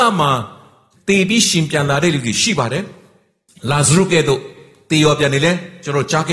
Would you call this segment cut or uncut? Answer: uncut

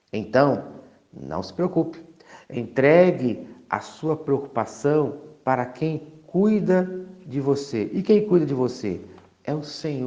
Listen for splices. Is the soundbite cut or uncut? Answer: uncut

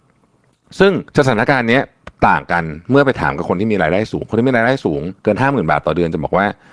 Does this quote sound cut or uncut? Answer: cut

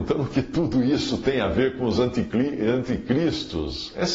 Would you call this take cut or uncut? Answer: uncut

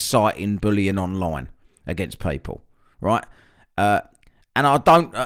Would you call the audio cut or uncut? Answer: uncut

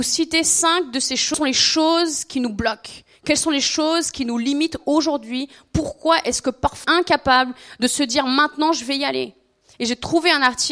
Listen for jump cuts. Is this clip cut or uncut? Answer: uncut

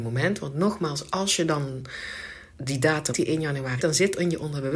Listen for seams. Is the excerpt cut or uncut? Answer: cut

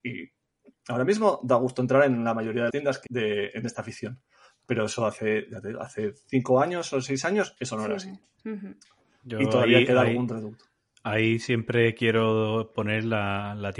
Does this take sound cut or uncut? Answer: cut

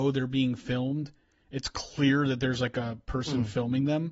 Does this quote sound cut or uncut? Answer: uncut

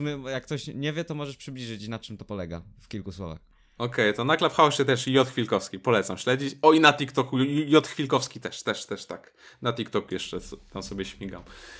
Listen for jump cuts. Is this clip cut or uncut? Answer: uncut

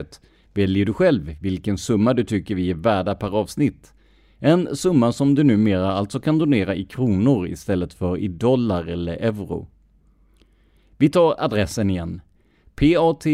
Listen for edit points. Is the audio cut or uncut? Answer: uncut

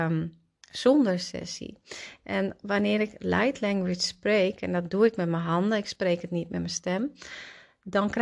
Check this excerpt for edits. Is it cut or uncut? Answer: uncut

